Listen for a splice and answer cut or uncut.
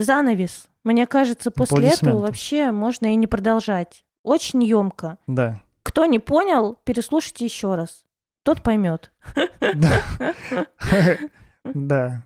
uncut